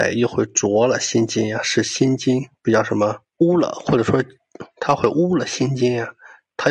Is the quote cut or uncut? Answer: cut